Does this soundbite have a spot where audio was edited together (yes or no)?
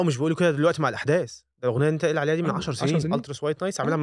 no